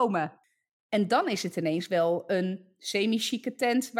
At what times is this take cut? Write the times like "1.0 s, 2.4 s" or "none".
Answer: none